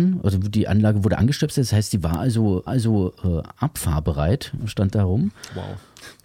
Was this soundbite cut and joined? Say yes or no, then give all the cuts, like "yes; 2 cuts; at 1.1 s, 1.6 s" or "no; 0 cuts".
yes; 1 cut; at 2.7 s